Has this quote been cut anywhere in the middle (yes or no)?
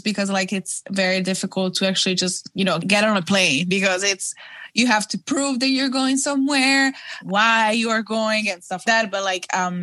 yes